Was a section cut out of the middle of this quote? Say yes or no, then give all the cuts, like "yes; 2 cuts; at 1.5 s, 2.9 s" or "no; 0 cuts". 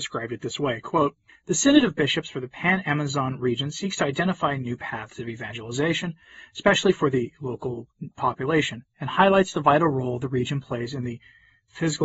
yes; 1 cut; at 1.3 s